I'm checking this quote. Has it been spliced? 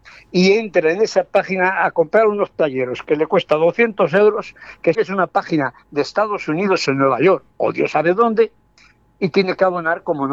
yes; 1 cut; at 4.9 s

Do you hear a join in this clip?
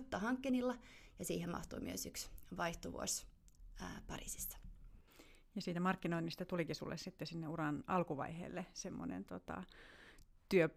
no; 0 cuts

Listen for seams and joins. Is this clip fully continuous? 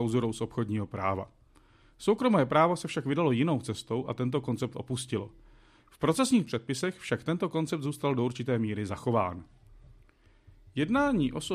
yes; 0 cuts

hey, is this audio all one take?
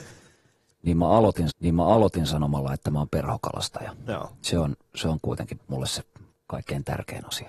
no; 2 cuts; at 1.5 s, 5.6 s

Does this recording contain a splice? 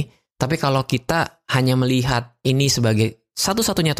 no; 0 cuts

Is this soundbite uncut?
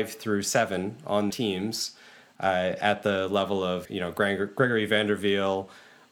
no; 2 cuts; at 1.3 s, 3.9 s

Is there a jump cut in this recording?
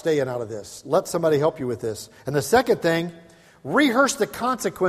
no; 0 cuts

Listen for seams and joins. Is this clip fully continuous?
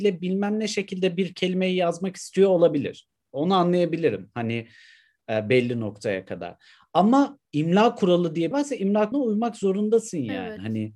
no; 3 cuts; at 7.4 s, 8.5 s, 9.1 s

